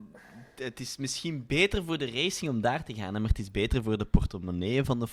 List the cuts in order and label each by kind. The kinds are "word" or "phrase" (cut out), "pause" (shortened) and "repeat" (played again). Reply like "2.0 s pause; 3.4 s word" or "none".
none